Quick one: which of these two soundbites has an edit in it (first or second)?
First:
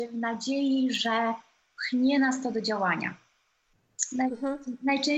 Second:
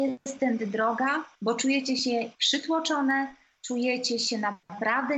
second